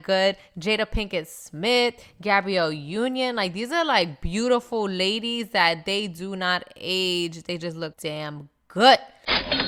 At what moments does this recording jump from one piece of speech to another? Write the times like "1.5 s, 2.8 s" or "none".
7.9 s

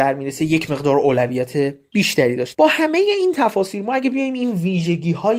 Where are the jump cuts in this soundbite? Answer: 2.5 s

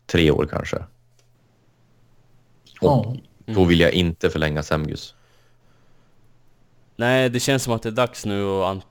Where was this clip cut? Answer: none

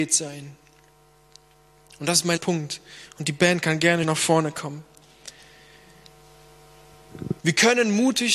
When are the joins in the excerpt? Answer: 2.4 s, 4.0 s, 7.4 s

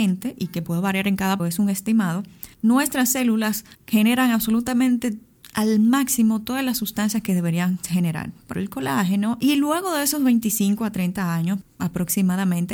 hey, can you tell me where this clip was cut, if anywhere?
1.4 s, 2.5 s, 3.7 s, 8.5 s

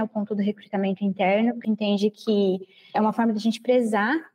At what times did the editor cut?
1.6 s, 2.9 s

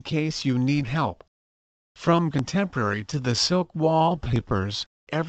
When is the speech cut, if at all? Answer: none

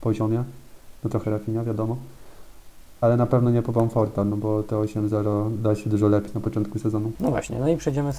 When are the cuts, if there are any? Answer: 1.2 s, 6.3 s

